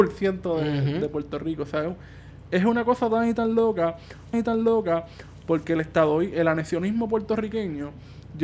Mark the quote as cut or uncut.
cut